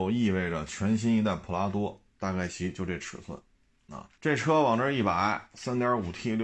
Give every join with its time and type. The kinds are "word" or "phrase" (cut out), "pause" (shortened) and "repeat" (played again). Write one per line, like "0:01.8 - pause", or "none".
0:04.1 - pause